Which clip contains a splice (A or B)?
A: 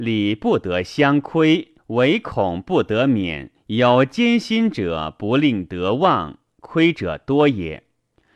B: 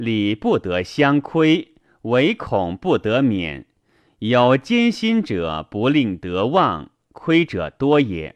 A